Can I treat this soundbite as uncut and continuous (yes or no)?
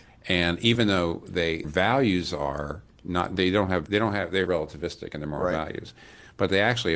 no